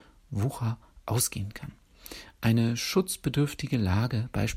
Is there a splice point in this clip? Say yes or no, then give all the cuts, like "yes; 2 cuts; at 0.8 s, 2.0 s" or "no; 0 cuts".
no; 0 cuts